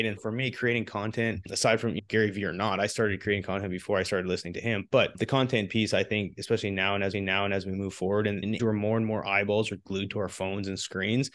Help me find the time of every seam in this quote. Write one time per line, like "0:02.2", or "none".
0:07.1
0:08.6